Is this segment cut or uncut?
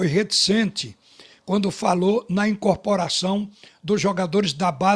uncut